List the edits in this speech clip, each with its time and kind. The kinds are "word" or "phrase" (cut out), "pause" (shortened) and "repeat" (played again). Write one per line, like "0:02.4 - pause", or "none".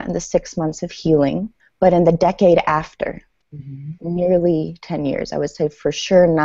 0:01.6 - pause
0:03.4 - pause